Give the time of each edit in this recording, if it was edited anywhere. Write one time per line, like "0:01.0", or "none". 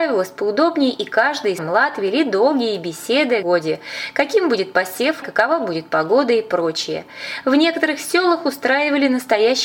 0:01.6
0:03.4
0:05.2